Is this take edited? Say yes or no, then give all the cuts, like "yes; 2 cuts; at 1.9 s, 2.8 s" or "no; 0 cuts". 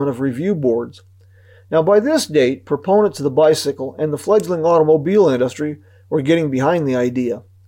no; 0 cuts